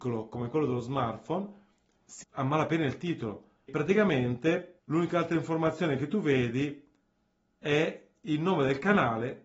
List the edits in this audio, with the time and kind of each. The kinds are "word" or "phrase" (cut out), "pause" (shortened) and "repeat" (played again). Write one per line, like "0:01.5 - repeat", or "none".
0:02.2 - word
0:03.7 - word
0:04.8 - pause